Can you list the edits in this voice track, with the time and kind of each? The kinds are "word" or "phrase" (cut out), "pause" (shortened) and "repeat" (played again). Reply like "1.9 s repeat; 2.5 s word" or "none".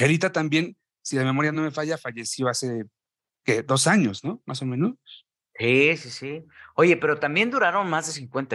none